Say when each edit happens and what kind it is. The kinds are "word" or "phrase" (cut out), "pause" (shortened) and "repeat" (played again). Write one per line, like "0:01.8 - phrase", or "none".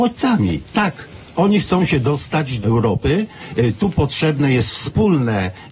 0:02.6 - phrase